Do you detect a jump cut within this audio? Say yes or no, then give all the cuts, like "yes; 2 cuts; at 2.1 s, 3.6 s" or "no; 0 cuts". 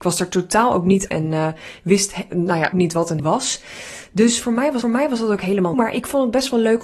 yes; 5 cuts; at 1.1 s, 2.7 s, 3.2 s, 4.8 s, 5.7 s